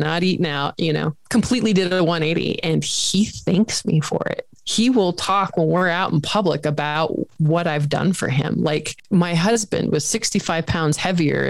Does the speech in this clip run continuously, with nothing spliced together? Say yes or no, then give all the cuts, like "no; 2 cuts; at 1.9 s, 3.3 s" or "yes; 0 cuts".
yes; 0 cuts